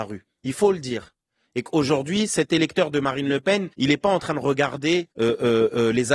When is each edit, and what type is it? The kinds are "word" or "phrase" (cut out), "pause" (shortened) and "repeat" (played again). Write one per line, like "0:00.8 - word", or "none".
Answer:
0:03.7 - pause
0:05.1 - pause